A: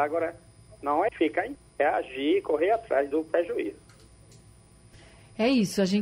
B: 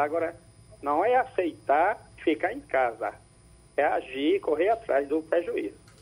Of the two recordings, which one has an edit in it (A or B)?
A